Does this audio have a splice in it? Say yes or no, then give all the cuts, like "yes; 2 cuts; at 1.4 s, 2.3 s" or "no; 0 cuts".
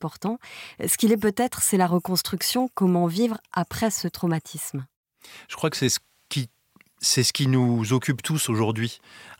no; 0 cuts